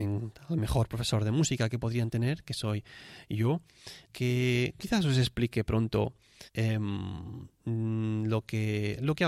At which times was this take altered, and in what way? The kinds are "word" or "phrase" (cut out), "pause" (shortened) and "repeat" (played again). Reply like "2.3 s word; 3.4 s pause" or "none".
4.0 s pause; 6.5 s pause

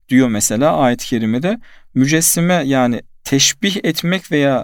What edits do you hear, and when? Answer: none

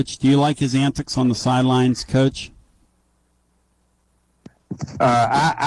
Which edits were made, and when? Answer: none

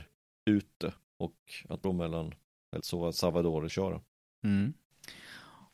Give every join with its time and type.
1.0 s pause; 1.8 s phrase; 2.8 s word; 3.7 s word

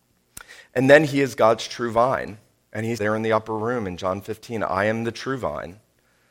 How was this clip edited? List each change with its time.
3.0 s word

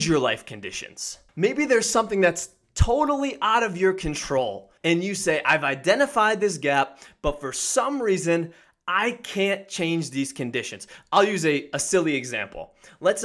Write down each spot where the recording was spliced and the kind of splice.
1.3 s pause; 4.8 s pause

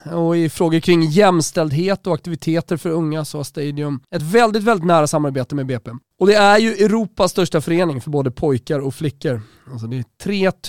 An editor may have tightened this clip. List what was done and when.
none

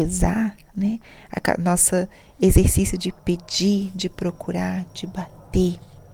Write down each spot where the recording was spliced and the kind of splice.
none

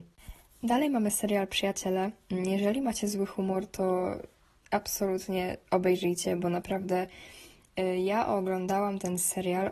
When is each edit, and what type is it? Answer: none

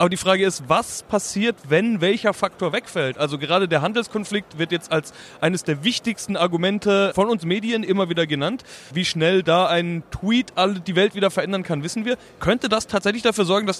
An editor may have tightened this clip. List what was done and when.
none

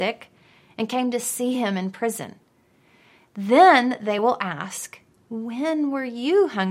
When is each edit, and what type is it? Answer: none

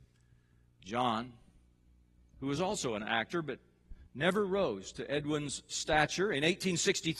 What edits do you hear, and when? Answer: none

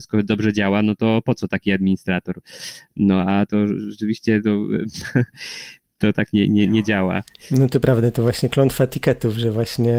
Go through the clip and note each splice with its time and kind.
3.5 s word

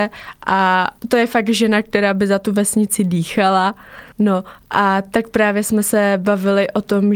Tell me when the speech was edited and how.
1.0 s pause; 4.1 s pause

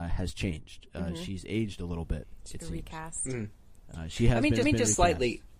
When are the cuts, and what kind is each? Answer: 4.6 s repeat

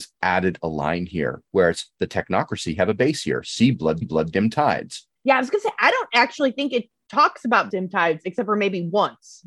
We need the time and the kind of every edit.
1.5 s pause; 4.0 s repeat; 5.2 s pause; 7.7 s word

